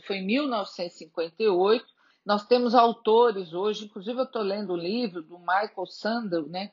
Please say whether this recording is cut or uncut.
uncut